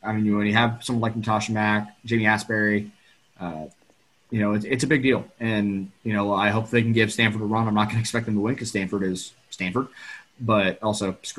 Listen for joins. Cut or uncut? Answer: uncut